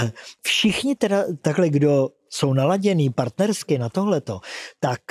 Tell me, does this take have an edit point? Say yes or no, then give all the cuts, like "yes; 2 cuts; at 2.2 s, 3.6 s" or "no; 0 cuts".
no; 0 cuts